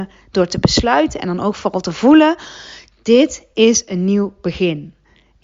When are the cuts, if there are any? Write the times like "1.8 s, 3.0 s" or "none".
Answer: none